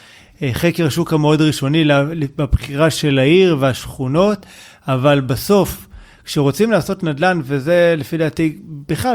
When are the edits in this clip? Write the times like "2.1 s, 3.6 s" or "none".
none

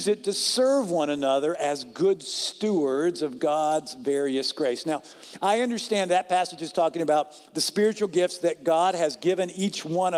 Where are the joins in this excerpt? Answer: none

